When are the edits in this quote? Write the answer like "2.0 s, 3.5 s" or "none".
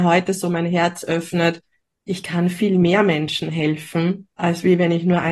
none

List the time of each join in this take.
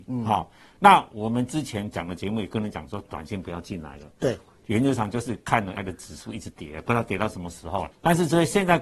5.7 s

